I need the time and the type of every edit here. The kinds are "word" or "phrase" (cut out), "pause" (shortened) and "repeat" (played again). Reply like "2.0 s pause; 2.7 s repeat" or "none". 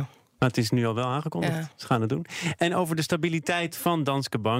1.7 s pause